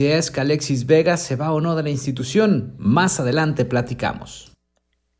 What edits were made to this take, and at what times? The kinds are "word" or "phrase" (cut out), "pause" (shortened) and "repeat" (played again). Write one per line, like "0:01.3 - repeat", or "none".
none